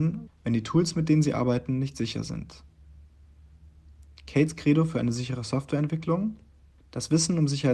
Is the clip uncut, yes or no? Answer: yes